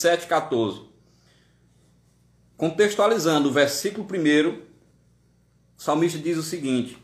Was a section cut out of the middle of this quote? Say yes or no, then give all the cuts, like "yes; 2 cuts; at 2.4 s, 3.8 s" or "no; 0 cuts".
no; 0 cuts